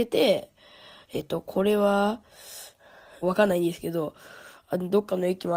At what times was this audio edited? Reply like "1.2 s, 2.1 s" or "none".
3.2 s